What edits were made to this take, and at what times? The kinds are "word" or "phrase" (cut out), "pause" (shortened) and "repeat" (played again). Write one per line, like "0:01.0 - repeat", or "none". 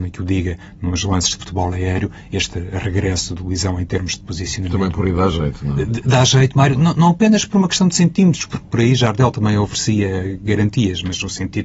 none